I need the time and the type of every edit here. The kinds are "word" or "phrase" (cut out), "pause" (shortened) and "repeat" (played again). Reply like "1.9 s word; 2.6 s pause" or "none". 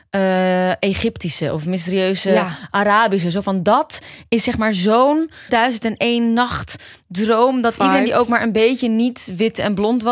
5.5 s word